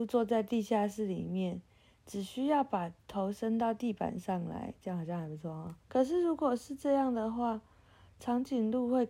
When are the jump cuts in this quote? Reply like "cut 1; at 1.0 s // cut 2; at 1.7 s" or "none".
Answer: cut 1; at 3.0 s // cut 2; at 5.8 s